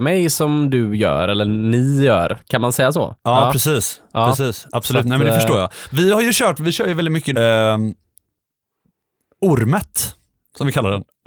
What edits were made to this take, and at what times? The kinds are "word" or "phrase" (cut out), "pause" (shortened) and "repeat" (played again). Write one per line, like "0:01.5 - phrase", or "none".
0:07.3 - word